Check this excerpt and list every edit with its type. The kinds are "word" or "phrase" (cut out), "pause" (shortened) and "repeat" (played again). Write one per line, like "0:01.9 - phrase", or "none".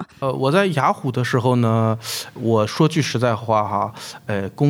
0:02.4 - word

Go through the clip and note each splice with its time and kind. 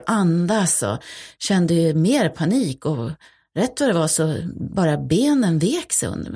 none

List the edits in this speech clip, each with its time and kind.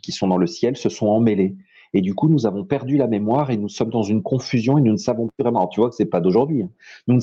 none

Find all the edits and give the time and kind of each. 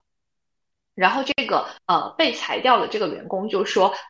0:01.8 - pause

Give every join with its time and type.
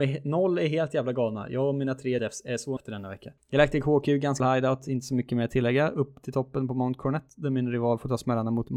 0:02.2 - word
0:02.8 - word
0:03.4 - pause
0:04.4 - word

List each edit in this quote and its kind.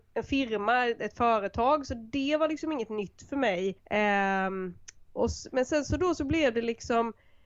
0:03.8 - pause

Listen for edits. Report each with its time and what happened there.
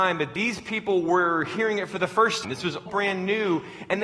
0:02.4 - word
0:02.9 - word

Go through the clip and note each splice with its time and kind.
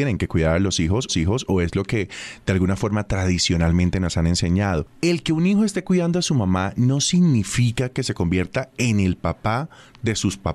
0:01.1 - repeat

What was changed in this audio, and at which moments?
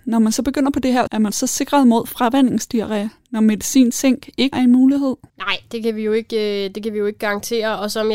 0:01.1 - word
0:04.5 - word
0:05.3 - pause

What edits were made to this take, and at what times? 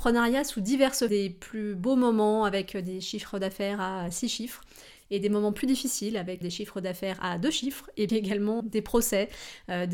0:01.1 - word
0:06.4 - word
0:08.1 - word
0:08.6 - word

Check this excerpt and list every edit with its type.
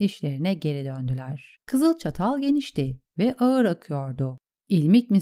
0:01.6 - pause

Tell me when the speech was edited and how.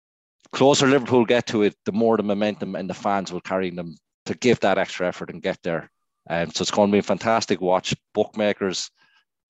none

